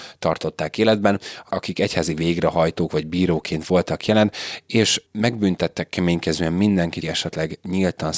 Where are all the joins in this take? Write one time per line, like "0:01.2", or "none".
0:05.1
0:07.0